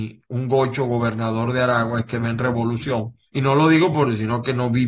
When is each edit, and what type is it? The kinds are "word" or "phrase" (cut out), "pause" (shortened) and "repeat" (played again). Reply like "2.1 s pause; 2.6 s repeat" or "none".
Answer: 2.1 s phrase; 3.3 s pause